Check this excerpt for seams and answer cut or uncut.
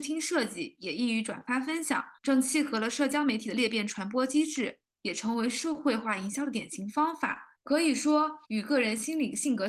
cut